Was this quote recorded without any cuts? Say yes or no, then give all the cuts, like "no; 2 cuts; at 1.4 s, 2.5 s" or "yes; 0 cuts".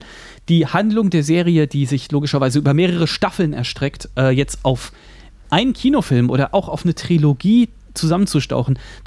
yes; 0 cuts